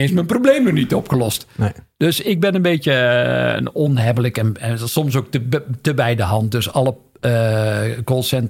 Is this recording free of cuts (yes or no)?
yes